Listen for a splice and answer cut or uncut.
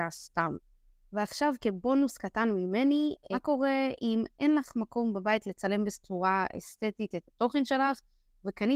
uncut